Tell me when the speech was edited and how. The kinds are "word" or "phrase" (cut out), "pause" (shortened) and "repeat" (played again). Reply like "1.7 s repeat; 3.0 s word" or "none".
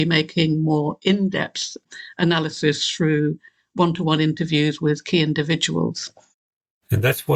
none